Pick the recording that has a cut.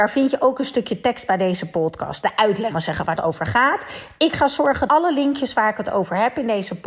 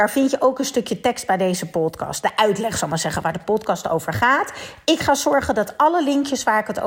first; 3 cuts; at 2.7 s, 3.2 s, 4.9 s

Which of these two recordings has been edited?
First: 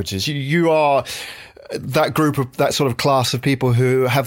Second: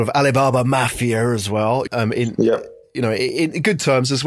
second; 1 cut; at 1.9 s

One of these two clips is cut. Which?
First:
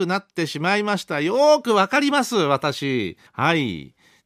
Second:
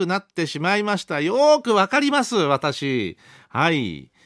first; 1 cut; at 3.3 s

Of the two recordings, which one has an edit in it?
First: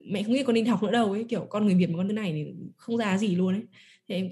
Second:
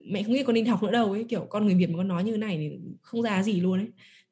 first; 1 cut; at 2.1 s

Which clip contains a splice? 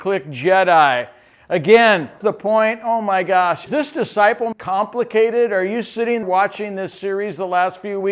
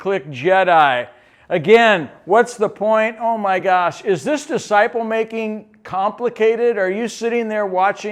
first; 4 cuts; at 2.2 s, 3.7 s, 4.5 s, 6.2 s

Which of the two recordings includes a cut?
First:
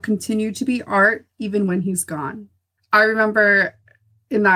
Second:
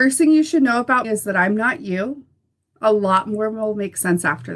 second; 1 cut; at 1.0 s

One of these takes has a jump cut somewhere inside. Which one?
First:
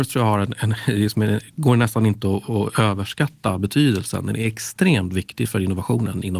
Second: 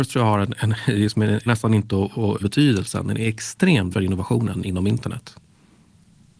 second; 3 cuts; at 1.5 s, 2.4 s, 3.9 s

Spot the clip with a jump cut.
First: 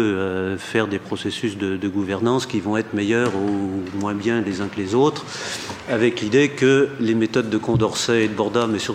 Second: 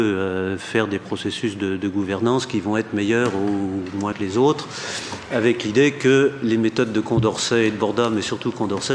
second; 1 cut; at 4.1 s

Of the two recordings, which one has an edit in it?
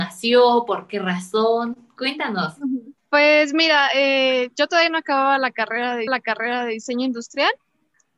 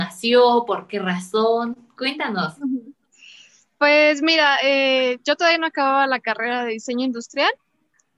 first; 2 cuts; at 3.0 s, 6.1 s

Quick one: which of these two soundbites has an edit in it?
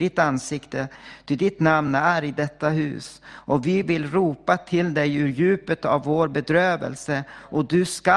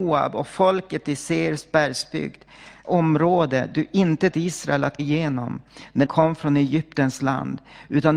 second; 4 cuts; at 2.8 s, 4.3 s, 5.0 s, 6.0 s

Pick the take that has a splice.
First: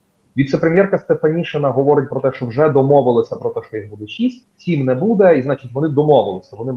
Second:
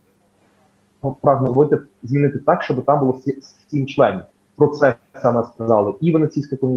first; 1 cut; at 4.5 s

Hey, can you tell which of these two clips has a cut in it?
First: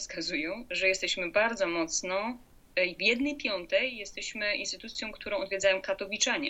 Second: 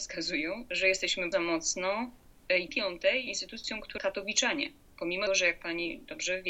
second; 5 cuts; at 1.3 s, 2.7 s, 3.3 s, 4.0 s, 5.3 s

